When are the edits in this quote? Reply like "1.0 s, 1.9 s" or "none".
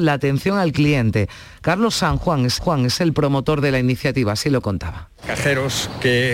2.6 s